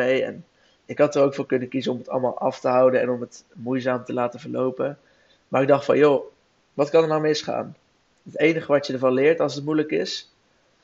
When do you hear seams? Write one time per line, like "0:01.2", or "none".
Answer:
none

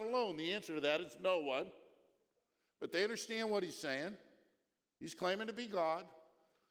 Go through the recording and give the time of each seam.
none

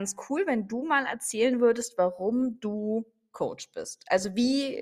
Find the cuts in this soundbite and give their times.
none

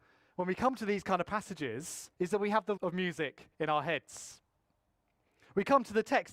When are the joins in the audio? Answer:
0:02.1
0:02.8
0:03.5

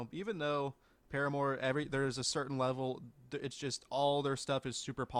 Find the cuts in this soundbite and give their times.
none

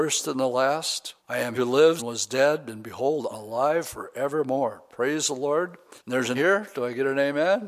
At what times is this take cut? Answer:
0:01.2
0:01.6
0:02.0
0:03.3
0:06.0
0:06.3

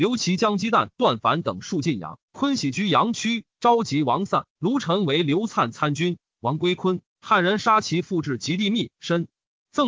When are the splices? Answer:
0:02.2
0:04.5

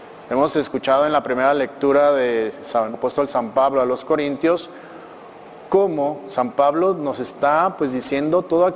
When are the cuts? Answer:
0:02.9

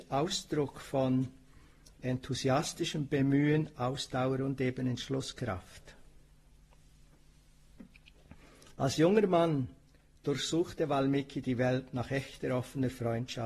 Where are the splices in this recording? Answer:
none

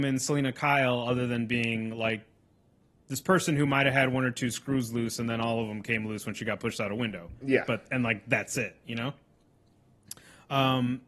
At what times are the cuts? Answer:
none

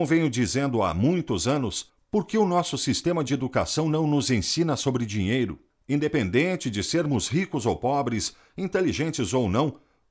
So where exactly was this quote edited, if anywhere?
none

